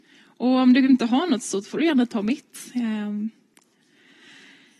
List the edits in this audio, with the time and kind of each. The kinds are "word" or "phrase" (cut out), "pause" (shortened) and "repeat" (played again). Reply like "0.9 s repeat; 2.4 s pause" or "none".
none